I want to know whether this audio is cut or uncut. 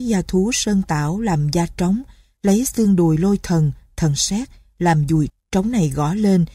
cut